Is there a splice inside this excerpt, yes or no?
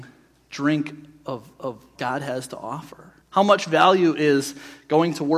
yes